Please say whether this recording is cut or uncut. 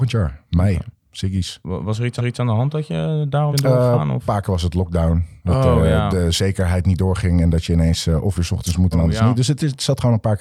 cut